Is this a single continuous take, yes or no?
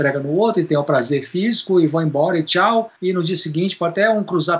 no